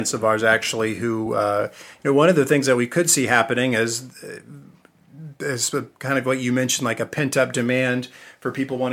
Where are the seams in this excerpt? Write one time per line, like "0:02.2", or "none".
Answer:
none